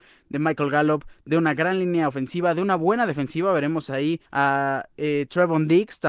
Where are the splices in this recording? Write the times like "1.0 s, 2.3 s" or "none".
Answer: 4.3 s